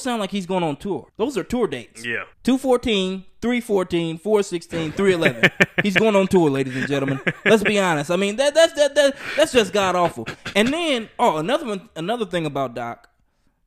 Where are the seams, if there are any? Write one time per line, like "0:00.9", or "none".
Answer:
0:01.1
0:02.3